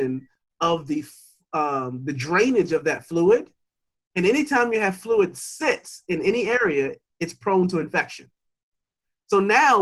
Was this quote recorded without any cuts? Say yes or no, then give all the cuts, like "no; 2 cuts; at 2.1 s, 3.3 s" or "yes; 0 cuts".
yes; 0 cuts